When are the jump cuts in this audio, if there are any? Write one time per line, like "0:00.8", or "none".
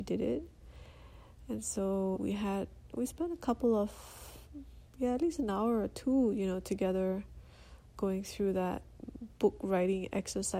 0:02.1